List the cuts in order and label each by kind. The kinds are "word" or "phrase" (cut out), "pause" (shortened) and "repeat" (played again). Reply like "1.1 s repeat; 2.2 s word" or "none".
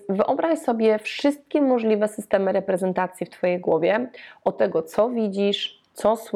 none